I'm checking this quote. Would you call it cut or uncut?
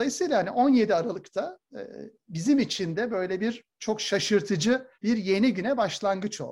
cut